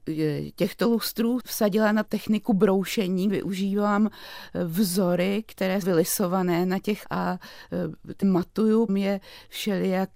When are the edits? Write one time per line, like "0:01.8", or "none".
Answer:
0:01.4
0:02.0
0:03.3
0:05.8
0:07.0
0:08.2
0:08.9